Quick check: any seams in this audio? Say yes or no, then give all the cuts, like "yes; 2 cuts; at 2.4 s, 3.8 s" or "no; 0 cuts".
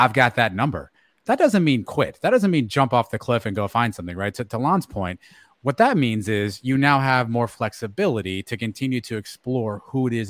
no; 0 cuts